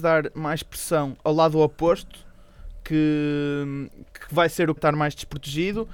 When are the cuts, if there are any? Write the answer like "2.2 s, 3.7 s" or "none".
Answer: 4.8 s